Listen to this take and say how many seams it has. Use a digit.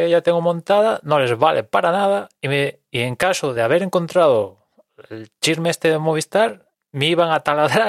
0